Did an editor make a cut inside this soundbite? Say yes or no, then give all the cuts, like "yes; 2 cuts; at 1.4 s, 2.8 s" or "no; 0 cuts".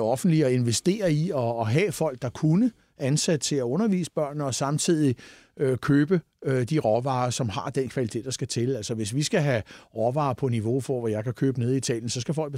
no; 0 cuts